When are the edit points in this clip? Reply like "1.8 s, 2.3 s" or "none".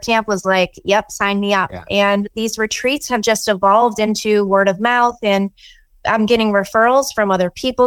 none

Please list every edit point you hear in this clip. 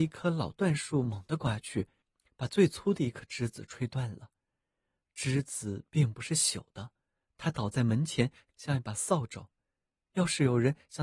none

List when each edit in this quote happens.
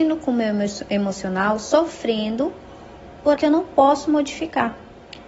3.4 s

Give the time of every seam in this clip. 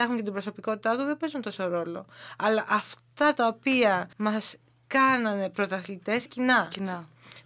4.1 s, 6.3 s

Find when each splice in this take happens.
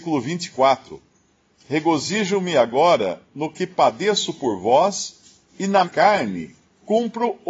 5.5 s, 5.8 s

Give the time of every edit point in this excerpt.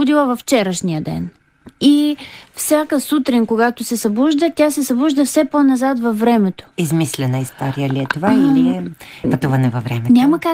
6.7 s

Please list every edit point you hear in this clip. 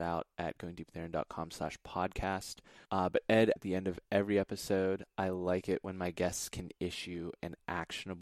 2.8 s, 3.6 s

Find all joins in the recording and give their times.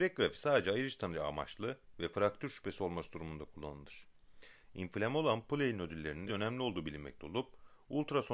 6.3 s

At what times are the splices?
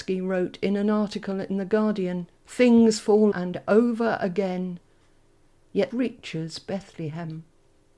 2.4 s, 3.3 s, 5.9 s

